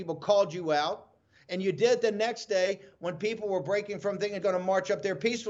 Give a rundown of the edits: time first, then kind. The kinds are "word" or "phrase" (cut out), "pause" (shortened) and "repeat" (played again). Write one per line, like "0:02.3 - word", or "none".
0:04.4 - word